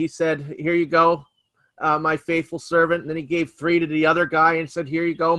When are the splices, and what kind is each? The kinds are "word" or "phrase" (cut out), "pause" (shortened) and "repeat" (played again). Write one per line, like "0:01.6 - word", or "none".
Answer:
none